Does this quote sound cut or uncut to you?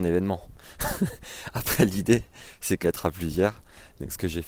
cut